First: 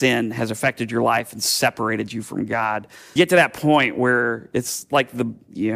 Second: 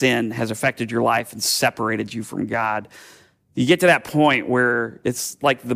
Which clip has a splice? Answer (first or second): first